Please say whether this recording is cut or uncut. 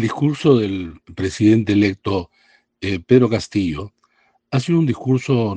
uncut